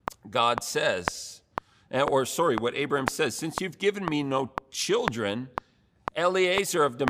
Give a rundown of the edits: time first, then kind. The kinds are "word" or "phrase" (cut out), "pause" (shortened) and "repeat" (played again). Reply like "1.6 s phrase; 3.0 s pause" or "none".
none